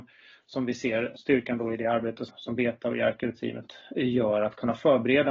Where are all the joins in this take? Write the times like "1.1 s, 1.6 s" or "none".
none

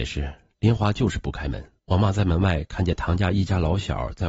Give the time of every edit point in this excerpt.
1.8 s

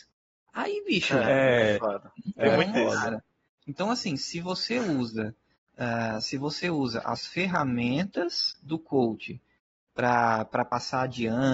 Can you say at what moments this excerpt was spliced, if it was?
2.4 s

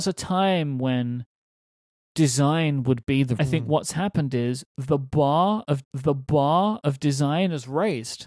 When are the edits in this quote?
3.4 s, 5.8 s

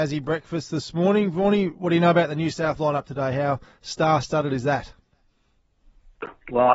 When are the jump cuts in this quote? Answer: 2.8 s

